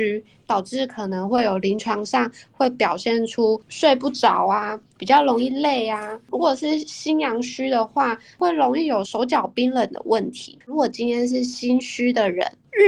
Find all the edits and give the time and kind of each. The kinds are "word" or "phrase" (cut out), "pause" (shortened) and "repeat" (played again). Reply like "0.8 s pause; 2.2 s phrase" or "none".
10.6 s pause